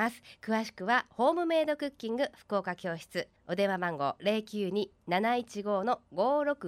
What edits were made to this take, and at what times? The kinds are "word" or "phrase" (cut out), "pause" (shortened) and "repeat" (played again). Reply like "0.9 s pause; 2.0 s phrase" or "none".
3.4 s pause

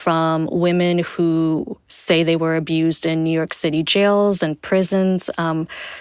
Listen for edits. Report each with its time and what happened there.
none

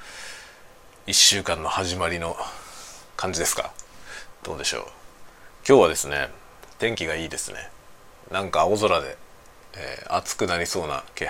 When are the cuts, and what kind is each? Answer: 8.1 s pause

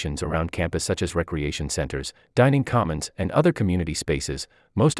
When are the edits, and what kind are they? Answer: none

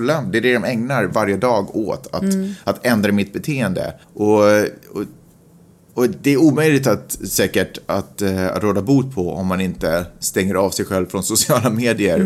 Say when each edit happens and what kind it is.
4.0 s pause

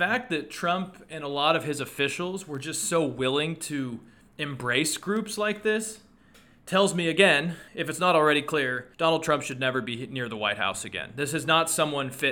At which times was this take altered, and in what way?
7.7 s pause; 8.9 s pause

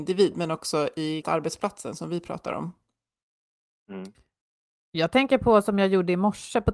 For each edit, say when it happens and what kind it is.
1.2 s word

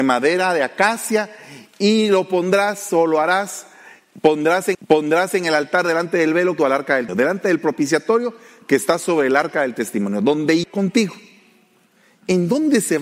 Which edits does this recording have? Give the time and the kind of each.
4.7 s repeat; 6.6 s phrase; 7.1 s word; 10.6 s phrase

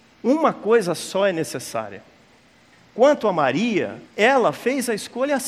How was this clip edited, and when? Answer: 2.7 s pause; 4.1 s pause

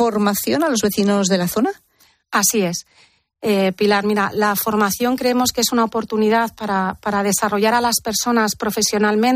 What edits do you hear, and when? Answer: none

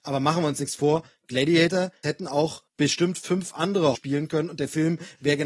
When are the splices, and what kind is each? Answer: 2.0 s word; 2.7 s pause; 3.9 s word

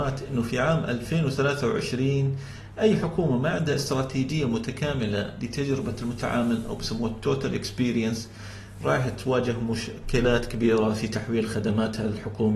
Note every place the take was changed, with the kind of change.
none

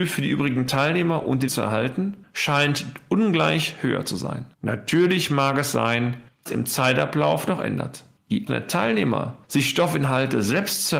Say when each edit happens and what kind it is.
1.5 s word; 4.5 s pause; 6.5 s phrase; 8.5 s word

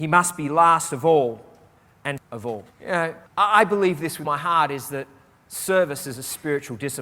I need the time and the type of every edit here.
2.2 s word; 2.7 s pause; 3.3 s pause; 4.2 s word

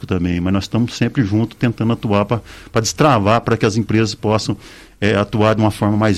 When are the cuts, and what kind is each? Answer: none

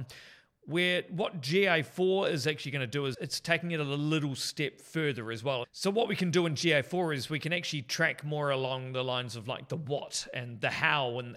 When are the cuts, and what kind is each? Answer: 3.1 s word

